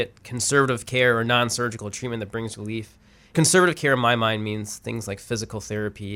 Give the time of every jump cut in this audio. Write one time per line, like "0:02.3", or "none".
0:03.3